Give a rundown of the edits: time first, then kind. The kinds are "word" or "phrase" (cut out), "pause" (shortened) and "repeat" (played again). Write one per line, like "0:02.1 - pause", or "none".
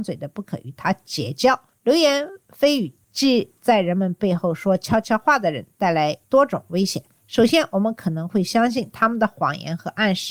0:06.2 - pause